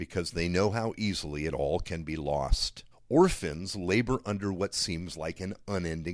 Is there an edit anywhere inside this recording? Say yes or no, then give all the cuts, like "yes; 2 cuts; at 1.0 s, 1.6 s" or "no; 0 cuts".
yes; 1 cut; at 2.9 s